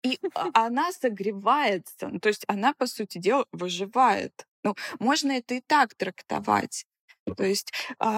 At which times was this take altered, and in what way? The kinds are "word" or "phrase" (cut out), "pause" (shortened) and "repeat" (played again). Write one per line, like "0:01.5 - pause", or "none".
0:04.5 - pause